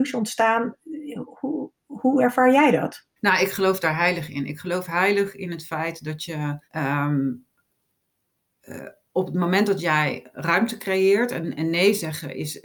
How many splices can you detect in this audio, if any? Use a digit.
2